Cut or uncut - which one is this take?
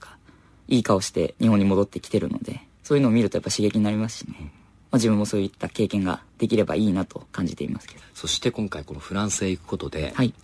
uncut